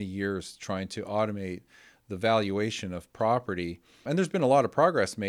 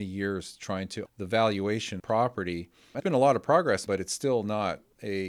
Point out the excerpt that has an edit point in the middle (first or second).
second